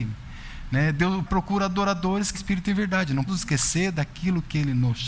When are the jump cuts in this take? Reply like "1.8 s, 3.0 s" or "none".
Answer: 1.3 s, 2.3 s, 3.3 s